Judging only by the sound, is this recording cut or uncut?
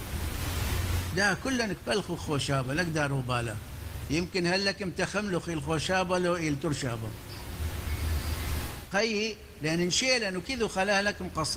uncut